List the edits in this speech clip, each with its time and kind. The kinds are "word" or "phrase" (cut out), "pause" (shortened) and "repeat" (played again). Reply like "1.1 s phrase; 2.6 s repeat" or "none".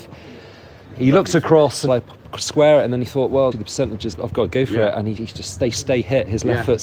1.9 s phrase; 3.5 s word; 4.1 s word; 5.2 s word

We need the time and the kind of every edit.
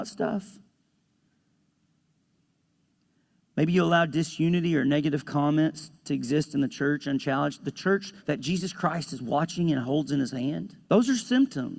8.2 s pause; 10.8 s pause

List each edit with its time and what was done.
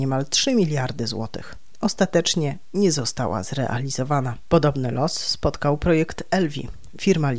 none

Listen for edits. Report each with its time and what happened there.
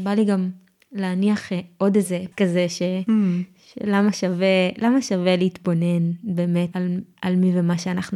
2.3 s word; 6.7 s word

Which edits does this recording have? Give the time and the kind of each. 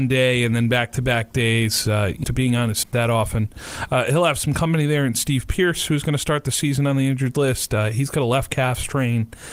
2.2 s phrase; 2.8 s word

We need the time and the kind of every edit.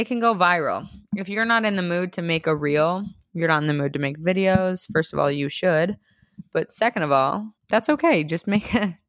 7.6 s pause

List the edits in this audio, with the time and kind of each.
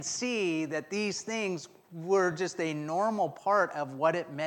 none

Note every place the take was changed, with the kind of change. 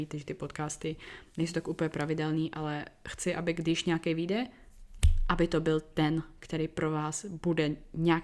none

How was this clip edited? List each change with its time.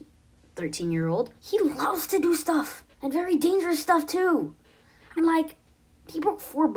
1.4 s pause; 2.9 s pause; 5.2 s word

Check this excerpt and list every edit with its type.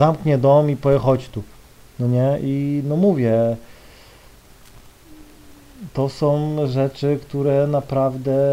1.6 s pause

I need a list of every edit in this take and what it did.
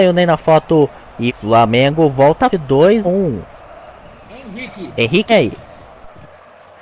1.3 s word; 2.5 s word; 3.0 s word; 4.0 s pause; 5.3 s word

